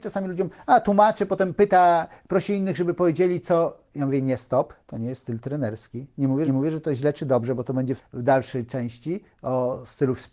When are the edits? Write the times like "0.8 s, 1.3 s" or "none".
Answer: 6.5 s, 8.0 s

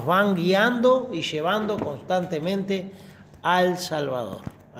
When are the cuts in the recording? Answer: none

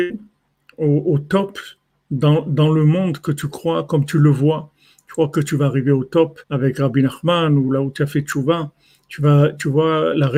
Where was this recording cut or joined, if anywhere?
6.4 s

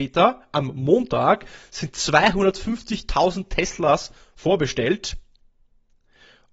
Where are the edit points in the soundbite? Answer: none

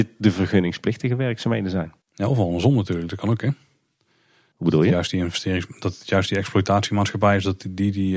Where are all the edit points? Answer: 2.0 s

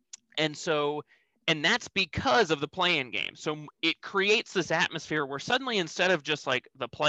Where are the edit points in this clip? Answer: 3.7 s

